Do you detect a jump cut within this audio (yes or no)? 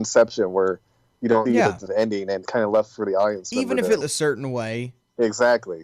yes